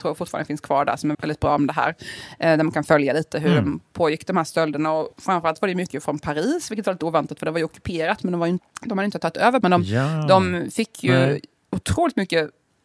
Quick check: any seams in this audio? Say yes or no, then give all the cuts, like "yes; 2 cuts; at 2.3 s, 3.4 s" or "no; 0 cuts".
yes; 4 cuts; at 1.1 s, 5.1 s, 8.6 s, 9.6 s